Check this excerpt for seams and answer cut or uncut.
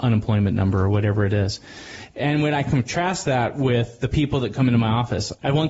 uncut